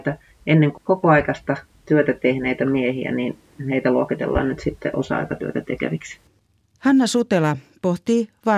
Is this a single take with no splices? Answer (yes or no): yes